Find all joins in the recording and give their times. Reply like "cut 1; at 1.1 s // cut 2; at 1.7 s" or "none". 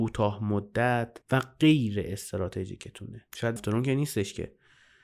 cut 1; at 1.2 s // cut 2; at 3.6 s